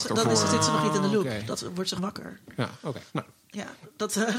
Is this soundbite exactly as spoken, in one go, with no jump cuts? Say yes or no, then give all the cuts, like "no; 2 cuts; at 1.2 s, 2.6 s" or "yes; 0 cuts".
no; 2 cuts; at 2.0 s, 3.1 s